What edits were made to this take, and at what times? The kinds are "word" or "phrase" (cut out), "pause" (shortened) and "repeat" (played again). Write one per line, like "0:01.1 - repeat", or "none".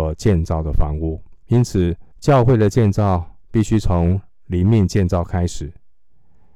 0:01.4 - pause
0:02.1 - pause
0:03.4 - pause